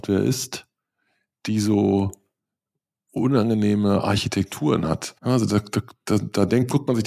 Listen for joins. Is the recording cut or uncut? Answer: cut